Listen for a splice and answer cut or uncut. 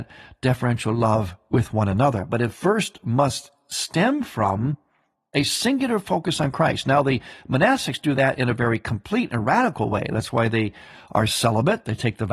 uncut